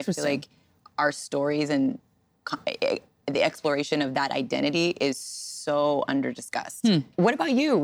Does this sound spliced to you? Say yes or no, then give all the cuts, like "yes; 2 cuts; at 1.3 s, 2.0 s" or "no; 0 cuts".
no; 0 cuts